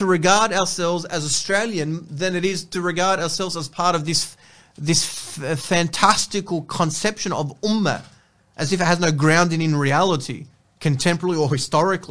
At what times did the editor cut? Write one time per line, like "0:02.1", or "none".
none

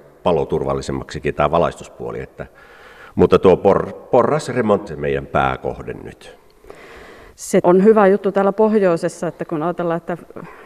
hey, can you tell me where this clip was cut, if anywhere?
0:04.9
0:07.6

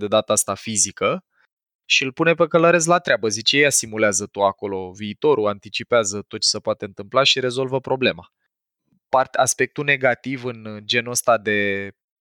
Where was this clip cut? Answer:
none

